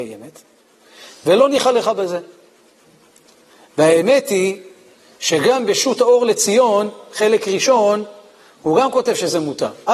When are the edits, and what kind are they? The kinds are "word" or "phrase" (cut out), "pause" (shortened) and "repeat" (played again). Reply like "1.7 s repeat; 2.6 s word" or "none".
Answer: none